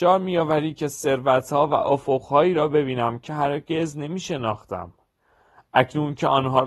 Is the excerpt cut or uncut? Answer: uncut